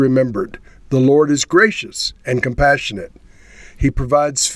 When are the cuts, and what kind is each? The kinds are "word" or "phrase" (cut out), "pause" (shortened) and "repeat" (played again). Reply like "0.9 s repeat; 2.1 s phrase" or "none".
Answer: 2.2 s pause

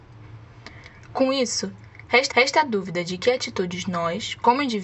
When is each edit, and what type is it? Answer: 2.3 s repeat

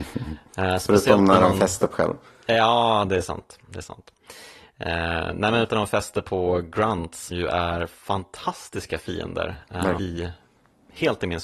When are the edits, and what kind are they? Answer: 1.9 s word; 5.7 s word; 7.3 s word; 10.0 s word

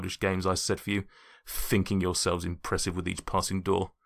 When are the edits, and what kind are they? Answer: none

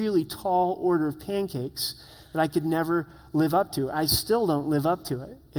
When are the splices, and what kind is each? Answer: none

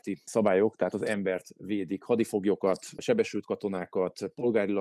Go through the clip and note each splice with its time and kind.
none

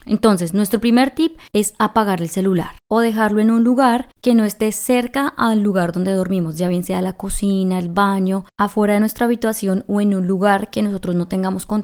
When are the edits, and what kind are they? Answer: 1.5 s pause; 2.8 s pause; 4.1 s pause; 8.5 s pause

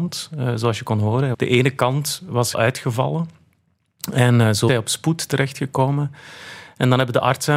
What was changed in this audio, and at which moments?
1.3 s word; 2.5 s word; 4.7 s word

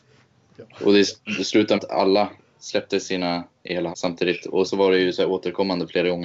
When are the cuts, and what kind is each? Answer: 1.8 s word; 3.6 s word; 3.9 s word; 4.7 s word

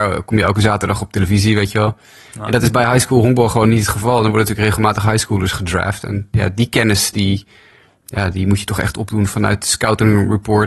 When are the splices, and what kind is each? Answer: none

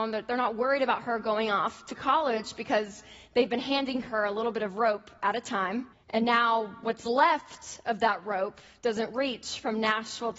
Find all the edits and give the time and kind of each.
5.9 s pause

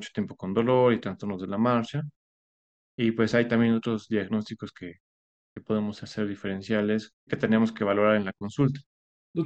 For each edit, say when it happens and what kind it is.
7.3 s word

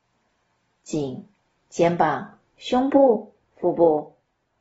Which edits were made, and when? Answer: 1.4 s pause; 2.5 s pause; 3.4 s pause

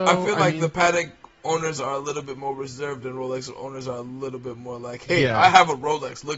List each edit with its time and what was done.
none

